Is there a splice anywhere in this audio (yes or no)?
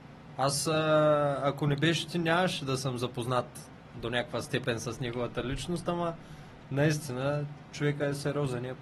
no